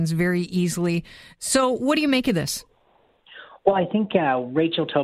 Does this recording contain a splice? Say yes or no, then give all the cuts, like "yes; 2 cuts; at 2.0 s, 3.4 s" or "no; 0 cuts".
no; 0 cuts